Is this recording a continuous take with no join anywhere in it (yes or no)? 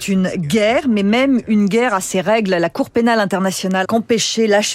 no